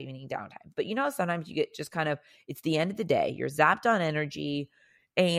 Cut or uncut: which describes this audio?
uncut